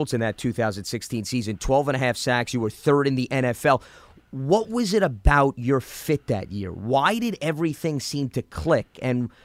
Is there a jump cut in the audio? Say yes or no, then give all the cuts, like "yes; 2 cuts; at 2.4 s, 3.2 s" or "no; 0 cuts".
no; 0 cuts